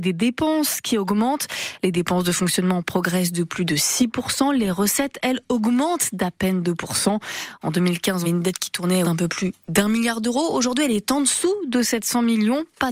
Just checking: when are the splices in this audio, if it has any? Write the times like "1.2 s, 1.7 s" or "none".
8.2 s, 9.0 s